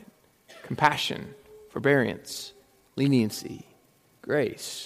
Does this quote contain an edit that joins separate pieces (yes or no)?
no